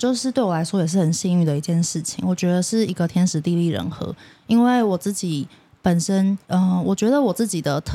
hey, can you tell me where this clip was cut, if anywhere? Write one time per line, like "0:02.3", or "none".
0:06.4